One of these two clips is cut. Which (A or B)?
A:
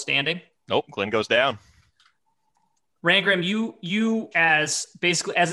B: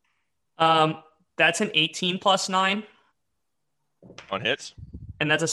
A